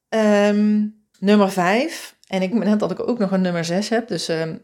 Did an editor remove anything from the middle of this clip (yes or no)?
yes